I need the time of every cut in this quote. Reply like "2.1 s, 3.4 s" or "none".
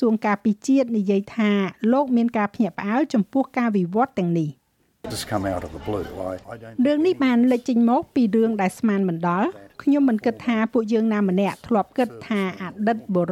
5.1 s, 6.4 s